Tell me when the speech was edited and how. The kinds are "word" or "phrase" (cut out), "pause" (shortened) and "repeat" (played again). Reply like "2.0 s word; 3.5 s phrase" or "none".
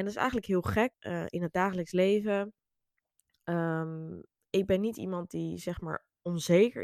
0.9 s word